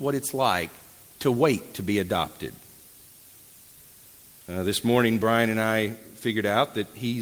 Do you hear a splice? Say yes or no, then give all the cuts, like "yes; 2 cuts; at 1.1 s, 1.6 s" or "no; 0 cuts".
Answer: no; 0 cuts